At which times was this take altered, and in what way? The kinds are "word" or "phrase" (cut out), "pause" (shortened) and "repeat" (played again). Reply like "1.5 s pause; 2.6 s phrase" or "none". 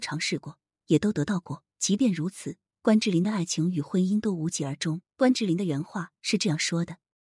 1.7 s pause; 5.1 s pause